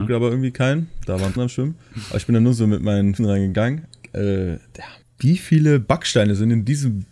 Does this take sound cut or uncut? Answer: cut